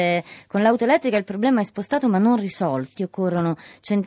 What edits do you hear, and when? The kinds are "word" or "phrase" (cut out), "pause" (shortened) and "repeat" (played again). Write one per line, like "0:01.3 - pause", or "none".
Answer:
0:02.9 - word